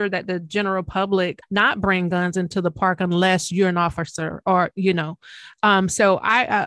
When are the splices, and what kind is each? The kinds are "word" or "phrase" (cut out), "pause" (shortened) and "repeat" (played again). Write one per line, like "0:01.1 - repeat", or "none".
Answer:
0:01.4 - word